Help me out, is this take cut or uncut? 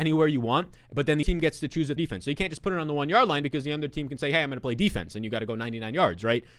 cut